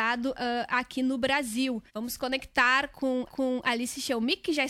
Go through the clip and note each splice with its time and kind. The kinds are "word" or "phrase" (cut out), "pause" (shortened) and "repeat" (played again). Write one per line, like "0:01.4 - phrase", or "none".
0:01.9 - pause
0:03.3 - repeat